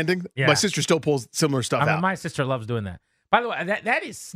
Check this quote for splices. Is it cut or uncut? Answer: uncut